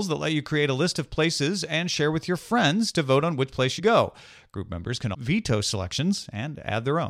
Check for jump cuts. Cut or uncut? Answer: cut